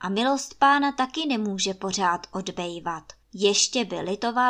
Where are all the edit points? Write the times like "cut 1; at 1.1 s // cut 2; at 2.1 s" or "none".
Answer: cut 1; at 3.2 s